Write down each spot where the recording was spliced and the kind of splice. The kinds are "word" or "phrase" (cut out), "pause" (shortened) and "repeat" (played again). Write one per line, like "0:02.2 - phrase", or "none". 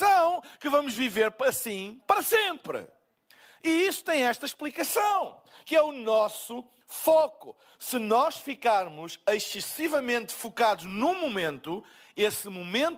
none